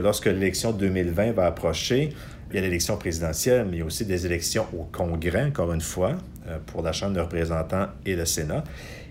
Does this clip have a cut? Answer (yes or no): yes